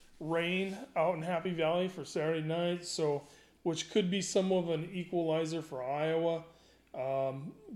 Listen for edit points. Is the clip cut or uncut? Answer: uncut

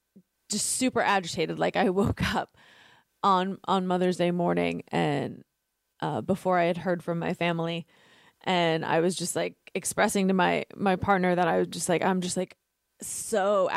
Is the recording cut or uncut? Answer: uncut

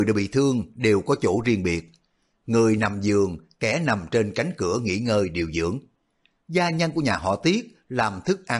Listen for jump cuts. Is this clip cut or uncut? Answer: uncut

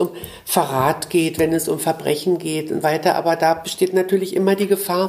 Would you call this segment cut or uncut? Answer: cut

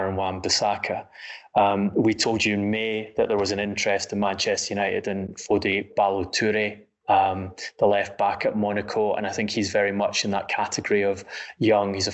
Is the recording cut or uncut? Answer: uncut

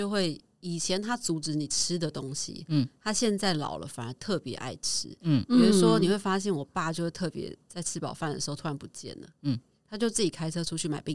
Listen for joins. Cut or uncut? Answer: uncut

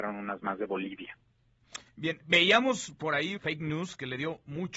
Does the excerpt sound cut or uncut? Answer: cut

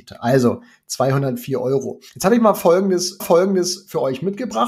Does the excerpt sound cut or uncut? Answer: cut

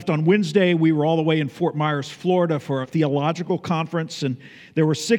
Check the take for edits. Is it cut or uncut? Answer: cut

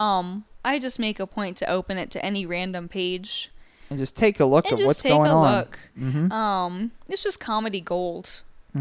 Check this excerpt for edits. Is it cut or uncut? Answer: uncut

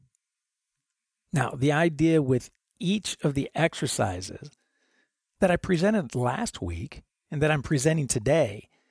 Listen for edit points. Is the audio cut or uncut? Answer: uncut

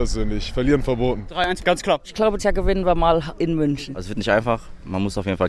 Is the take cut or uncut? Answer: cut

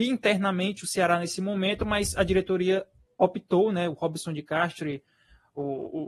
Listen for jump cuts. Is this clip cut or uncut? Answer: uncut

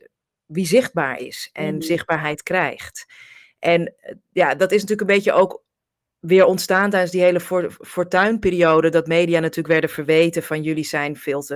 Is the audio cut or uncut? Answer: uncut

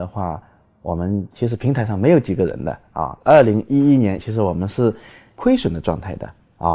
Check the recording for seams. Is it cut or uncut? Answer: cut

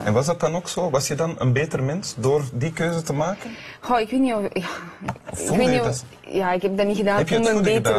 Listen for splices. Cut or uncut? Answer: uncut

